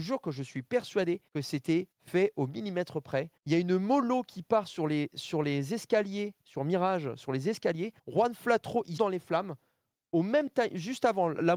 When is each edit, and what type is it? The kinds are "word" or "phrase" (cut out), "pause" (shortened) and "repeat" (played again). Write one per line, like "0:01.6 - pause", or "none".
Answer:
0:01.3 - pause
0:01.9 - pause
0:03.4 - pause
0:08.0 - pause
0:09.0 - word

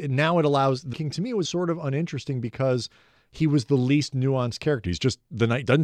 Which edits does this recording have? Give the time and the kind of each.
0:00.9 - word
0:01.4 - word

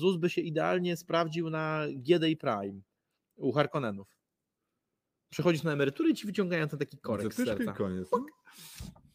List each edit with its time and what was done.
none

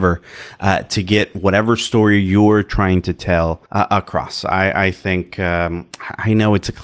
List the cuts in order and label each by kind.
0:03.7 - pause

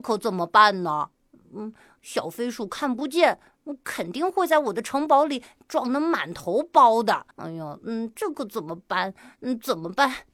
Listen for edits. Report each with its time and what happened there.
0:07.3 - pause

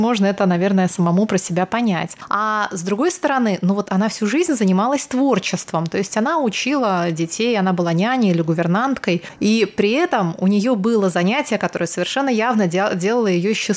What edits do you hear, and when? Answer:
none

